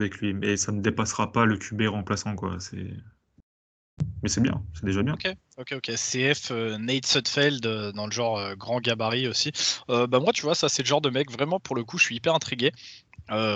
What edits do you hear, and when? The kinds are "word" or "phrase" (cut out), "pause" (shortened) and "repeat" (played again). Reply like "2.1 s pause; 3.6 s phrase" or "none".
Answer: none